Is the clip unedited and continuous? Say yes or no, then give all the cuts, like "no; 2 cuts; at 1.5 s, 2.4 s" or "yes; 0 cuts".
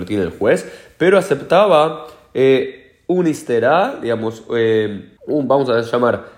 no; 1 cut; at 5.2 s